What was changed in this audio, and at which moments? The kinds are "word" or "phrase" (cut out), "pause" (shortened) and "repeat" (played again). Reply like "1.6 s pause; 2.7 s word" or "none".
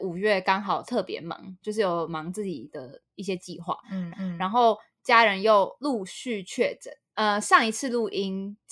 4.1 s repeat